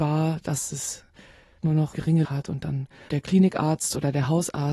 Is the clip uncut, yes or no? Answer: no